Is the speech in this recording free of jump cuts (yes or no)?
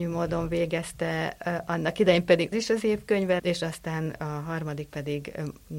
no